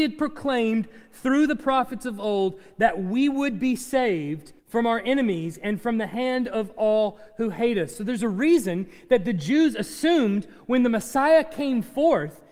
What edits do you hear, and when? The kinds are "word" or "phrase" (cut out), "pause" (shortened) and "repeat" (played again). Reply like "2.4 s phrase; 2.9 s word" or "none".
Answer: 4.6 s pause